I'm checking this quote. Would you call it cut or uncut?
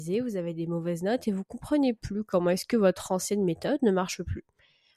uncut